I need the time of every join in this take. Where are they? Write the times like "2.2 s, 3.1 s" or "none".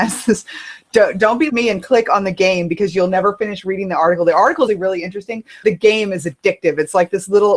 1.5 s, 4.7 s, 5.6 s